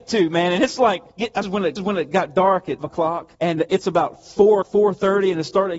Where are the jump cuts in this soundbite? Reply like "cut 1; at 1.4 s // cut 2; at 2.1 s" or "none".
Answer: cut 1; at 1.1 s // cut 2; at 1.4 s // cut 3; at 1.8 s // cut 4; at 2.8 s // cut 5; at 3.3 s // cut 6; at 4.6 s